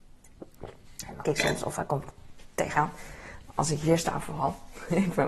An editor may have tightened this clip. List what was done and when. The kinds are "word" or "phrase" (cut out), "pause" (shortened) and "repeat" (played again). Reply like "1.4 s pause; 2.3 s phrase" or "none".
1.2 s phrase; 2.7 s word